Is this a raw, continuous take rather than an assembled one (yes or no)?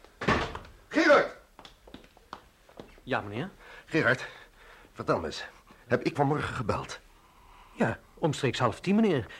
no